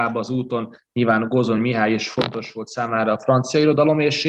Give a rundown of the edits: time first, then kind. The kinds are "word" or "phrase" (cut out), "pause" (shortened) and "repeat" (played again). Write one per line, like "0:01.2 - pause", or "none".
none

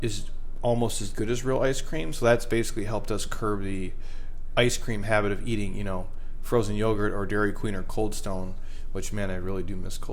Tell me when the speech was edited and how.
none

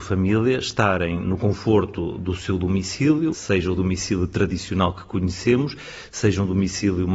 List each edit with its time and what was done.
0:01.2 - word
0:03.3 - word

